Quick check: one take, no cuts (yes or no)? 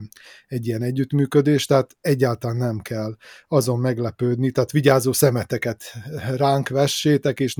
yes